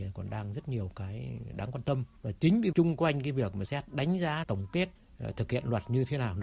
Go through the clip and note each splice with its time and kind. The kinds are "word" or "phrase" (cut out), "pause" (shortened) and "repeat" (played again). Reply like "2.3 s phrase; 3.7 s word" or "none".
2.7 s word; 3.7 s word; 4.4 s word